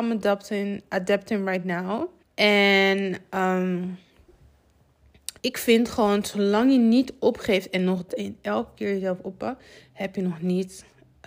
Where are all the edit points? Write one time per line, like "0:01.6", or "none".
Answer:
0:02.2
0:05.4
0:08.1